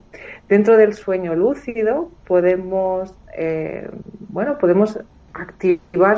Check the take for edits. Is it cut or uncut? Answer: uncut